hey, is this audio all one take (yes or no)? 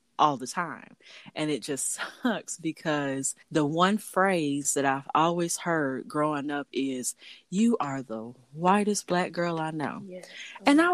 no